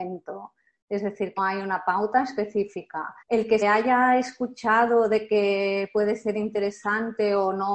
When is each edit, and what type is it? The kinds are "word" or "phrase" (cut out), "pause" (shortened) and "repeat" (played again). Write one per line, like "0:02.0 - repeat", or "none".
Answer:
0:01.4 - word
0:03.2 - pause
0:03.6 - word